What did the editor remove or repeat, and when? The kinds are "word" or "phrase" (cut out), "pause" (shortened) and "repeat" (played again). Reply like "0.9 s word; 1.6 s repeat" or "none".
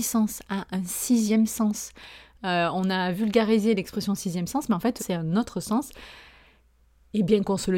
5.0 s word